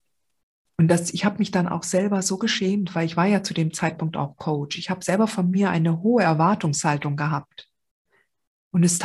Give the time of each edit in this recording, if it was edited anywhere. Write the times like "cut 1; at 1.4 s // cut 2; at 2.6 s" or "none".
none